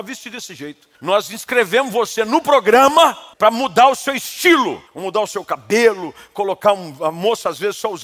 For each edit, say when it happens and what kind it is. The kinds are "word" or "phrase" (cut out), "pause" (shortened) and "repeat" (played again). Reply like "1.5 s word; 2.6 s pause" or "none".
0.9 s pause; 3.3 s pause; 4.9 s pause

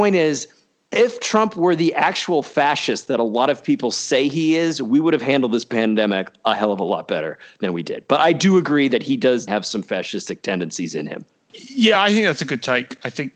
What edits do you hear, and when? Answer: 9.5 s word

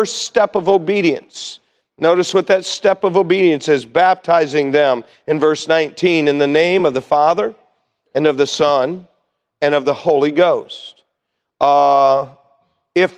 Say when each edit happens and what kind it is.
none

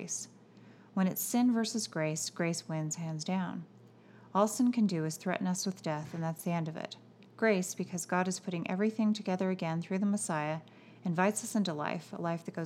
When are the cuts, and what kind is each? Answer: none

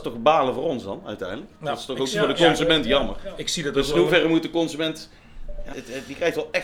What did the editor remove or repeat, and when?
3.9 s word; 5.7 s word

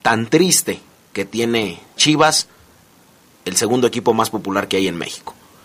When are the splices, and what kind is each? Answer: 2.0 s word

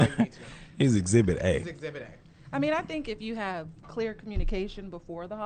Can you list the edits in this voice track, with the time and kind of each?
none

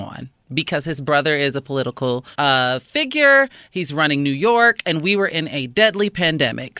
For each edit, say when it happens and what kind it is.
2.3 s pause

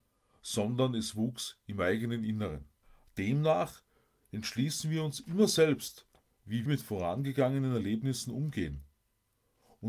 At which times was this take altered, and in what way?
2.8 s pause; 6.7 s word

